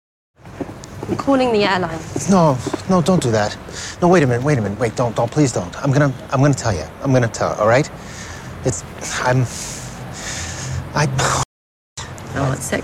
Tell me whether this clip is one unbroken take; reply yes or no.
yes